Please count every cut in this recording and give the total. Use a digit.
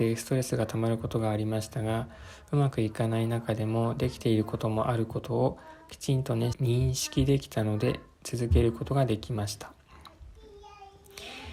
1